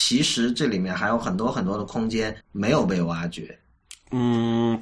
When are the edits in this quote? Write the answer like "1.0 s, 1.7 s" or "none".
2.4 s